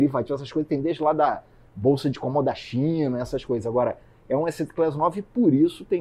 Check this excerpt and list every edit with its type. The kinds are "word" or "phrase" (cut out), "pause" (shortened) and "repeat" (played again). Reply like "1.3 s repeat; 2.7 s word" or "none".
none